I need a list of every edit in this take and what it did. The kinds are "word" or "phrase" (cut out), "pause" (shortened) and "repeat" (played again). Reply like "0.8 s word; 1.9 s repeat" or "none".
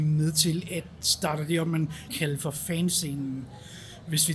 2.1 s word